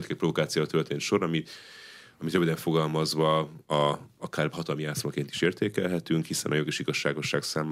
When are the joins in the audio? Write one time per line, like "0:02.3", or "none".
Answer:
0:03.6